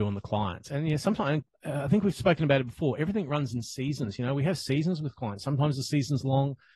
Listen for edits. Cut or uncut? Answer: cut